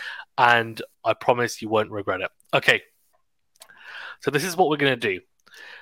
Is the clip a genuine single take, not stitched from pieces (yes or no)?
yes